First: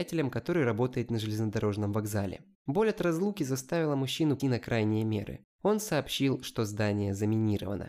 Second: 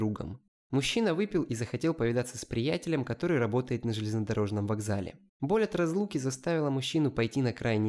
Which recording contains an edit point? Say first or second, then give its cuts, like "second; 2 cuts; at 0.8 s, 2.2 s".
first; 1 cut; at 4.4 s